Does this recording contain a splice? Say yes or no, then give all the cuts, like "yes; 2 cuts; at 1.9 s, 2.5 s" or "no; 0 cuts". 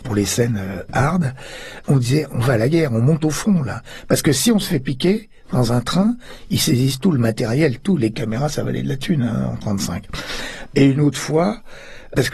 no; 0 cuts